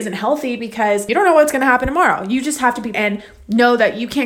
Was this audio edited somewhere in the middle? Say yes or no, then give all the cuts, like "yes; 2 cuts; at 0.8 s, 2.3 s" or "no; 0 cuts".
yes; 1 cut; at 2.9 s